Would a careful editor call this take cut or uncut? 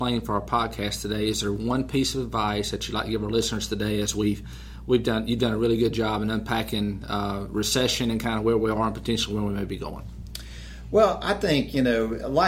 uncut